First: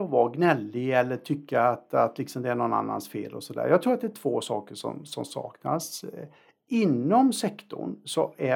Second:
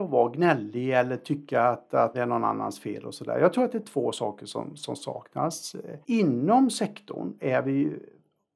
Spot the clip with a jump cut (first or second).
second